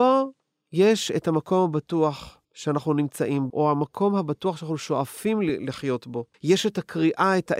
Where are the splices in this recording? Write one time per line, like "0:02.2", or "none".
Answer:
0:02.4
0:03.5
0:06.3

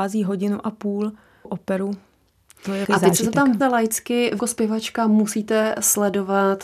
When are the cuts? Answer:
0:01.4
0:02.8
0:03.6
0:04.4

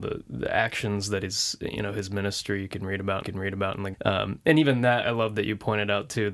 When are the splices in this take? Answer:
0:03.2
0:03.9
0:05.0

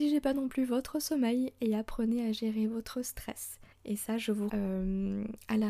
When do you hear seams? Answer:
0:03.7
0:04.5

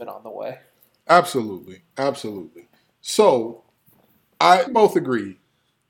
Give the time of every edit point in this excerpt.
0:04.7

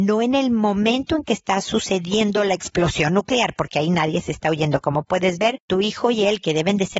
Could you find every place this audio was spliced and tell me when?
none

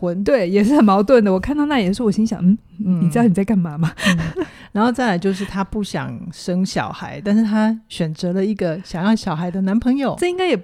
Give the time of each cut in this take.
none

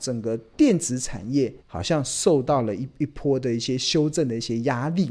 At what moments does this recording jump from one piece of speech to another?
0:01.6

